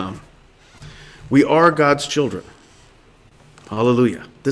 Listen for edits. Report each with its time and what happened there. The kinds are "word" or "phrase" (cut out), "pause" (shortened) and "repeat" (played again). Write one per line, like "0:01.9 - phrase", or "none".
none